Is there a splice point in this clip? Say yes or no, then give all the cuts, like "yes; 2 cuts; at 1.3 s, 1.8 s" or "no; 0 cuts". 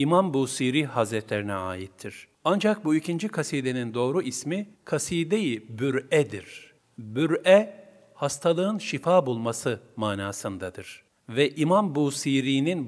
yes; 4 cuts; at 2.3 s, 4.7 s, 6.8 s, 11.1 s